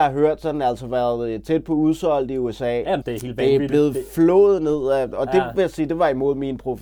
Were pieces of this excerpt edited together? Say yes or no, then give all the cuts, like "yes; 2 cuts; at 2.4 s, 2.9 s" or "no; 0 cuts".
yes; 1 cut; at 3.0 s